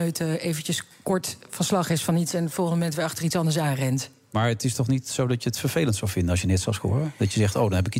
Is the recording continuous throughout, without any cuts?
yes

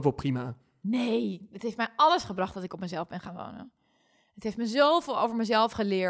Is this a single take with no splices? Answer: yes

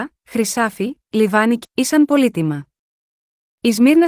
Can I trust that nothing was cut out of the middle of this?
no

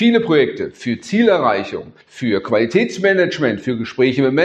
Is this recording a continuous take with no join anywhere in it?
no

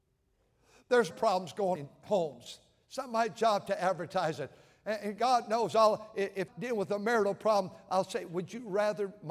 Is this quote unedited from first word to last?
no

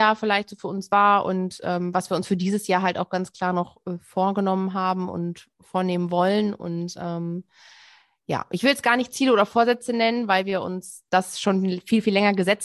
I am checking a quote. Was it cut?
no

